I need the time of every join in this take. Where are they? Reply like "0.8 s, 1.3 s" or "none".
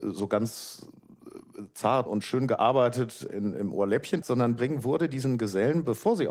2.1 s, 3.3 s, 4.2 s, 4.6 s

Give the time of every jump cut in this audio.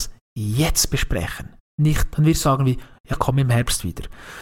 2.1 s, 2.4 s, 3.1 s

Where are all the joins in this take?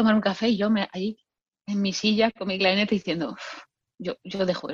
none

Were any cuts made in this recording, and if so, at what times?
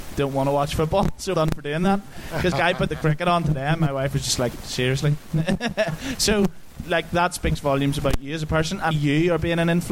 1.3 s, 2.5 s, 8.9 s

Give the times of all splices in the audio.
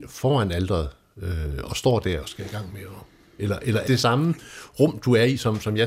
2.2 s, 3.9 s

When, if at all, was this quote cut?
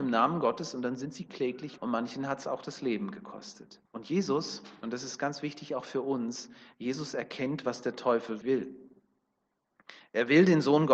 1.8 s, 3.9 s, 8.4 s

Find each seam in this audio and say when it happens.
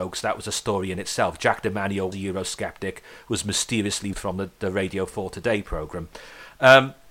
2.1 s, 4.1 s

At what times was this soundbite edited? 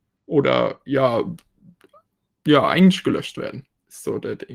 none

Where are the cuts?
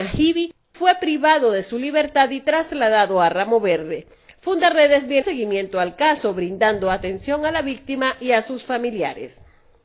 5.2 s

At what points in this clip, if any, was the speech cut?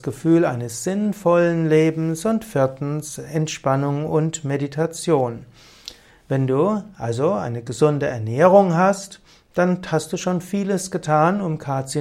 none

